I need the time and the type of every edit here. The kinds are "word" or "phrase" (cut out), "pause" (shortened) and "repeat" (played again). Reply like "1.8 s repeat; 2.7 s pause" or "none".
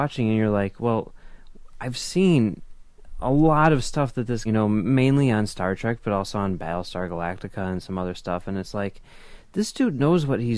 4.4 s phrase